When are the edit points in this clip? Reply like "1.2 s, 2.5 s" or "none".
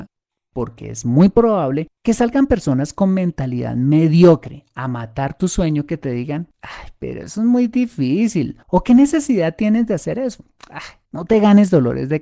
2.0 s, 6.5 s, 8.6 s, 11.1 s